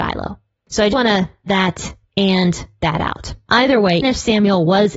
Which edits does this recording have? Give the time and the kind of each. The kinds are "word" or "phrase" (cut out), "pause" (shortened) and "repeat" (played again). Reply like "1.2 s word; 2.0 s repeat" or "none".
0.9 s word; 1.5 s word; 2.8 s word; 4.0 s word

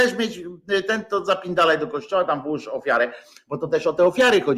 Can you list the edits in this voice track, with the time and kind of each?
none

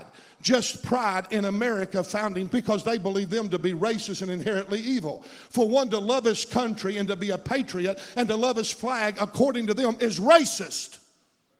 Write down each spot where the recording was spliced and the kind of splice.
2.5 s word

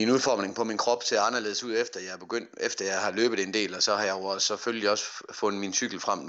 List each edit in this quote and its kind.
none

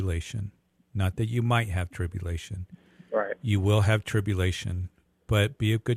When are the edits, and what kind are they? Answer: none

